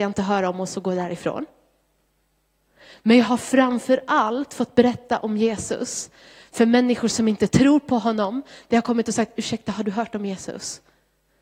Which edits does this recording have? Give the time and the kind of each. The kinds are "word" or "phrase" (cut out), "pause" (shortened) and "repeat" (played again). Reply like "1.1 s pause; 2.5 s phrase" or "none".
none